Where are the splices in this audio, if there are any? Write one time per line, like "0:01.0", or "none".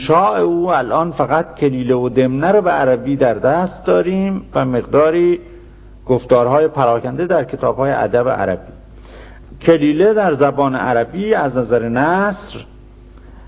none

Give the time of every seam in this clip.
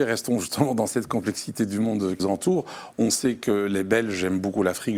0:02.2

